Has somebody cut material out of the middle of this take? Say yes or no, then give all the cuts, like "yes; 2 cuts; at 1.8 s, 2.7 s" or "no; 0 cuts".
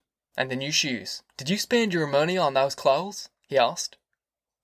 yes; 2 cuts; at 1.3 s, 3.4 s